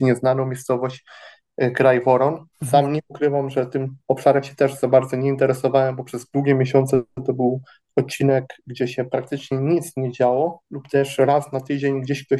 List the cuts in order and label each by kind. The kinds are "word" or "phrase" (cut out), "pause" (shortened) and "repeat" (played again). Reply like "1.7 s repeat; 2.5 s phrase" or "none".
2.5 s pause; 4.0 s pause; 7.7 s pause

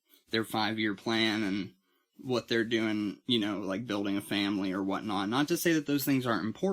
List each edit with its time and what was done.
none

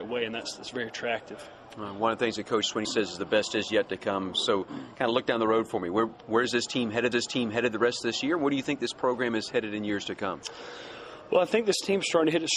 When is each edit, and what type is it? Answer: 2.8 s word; 7.1 s repeat

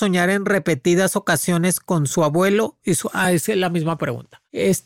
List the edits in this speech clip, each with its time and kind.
none

